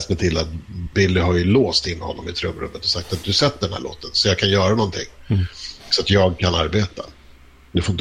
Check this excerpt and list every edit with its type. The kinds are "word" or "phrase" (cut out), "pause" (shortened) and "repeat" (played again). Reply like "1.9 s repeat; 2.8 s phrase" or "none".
5.8 s pause